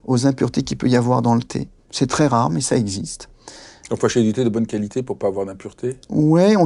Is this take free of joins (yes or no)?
yes